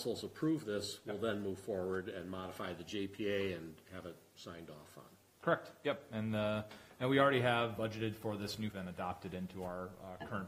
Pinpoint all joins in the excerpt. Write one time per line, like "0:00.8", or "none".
0:07.8
0:08.7